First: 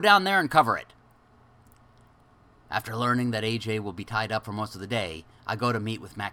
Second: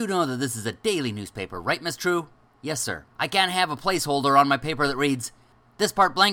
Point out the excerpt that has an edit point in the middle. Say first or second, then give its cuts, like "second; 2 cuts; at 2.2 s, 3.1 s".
second; 1 cut; at 3.1 s